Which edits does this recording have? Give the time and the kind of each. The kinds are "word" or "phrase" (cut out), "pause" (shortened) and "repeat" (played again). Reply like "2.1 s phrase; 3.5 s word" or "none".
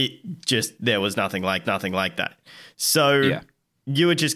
1.6 s repeat